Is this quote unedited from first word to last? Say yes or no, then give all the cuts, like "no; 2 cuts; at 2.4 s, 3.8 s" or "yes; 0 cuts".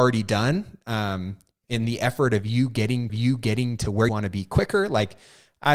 no; 3 cuts; at 1.6 s, 3.1 s, 4.1 s